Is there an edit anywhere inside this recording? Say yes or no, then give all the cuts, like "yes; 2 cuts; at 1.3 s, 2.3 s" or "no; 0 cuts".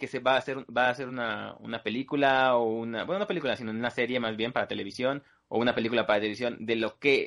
no; 0 cuts